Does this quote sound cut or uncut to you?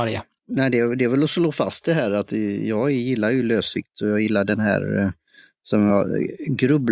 uncut